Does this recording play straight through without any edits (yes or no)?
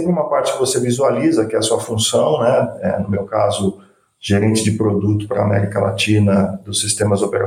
yes